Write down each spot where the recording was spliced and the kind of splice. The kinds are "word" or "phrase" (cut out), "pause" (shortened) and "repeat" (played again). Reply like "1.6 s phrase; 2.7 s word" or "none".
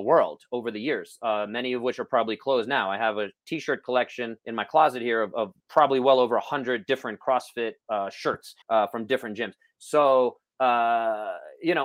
4.4 s pause; 5.6 s pause; 7.8 s pause; 8.6 s pause